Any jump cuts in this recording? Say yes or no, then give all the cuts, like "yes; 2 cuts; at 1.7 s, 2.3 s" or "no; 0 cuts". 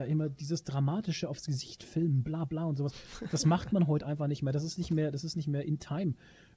no; 0 cuts